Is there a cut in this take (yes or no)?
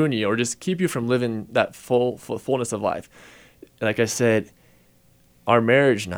no